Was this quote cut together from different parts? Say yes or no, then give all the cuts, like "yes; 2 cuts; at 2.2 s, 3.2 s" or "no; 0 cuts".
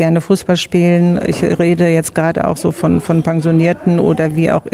no; 0 cuts